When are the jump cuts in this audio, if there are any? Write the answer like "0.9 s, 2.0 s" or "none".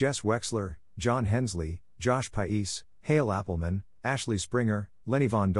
none